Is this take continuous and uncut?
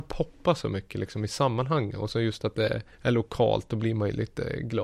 no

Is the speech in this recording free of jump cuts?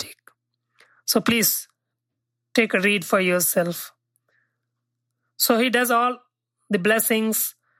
yes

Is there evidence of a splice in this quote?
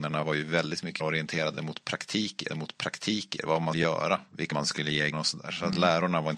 yes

